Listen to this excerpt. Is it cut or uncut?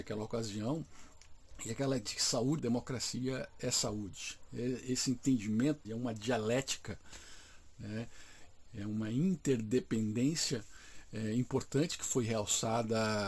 cut